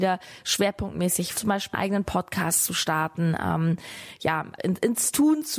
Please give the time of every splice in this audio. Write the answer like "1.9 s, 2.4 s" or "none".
1.4 s, 1.7 s, 4.6 s